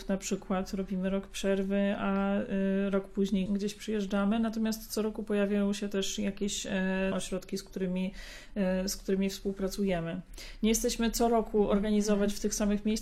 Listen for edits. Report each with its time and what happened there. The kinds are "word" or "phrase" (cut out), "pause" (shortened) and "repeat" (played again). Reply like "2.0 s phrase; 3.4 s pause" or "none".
3.5 s word; 7.1 s word

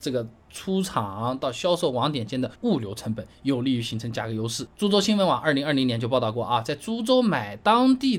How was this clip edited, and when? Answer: 2.5 s pause

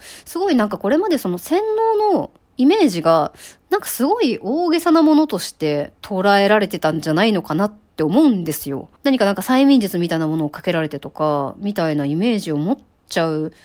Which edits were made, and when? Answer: 6.0 s pause; 9.0 s pause

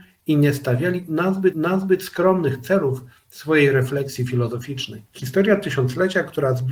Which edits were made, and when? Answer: 1.5 s repeat; 5.1 s pause

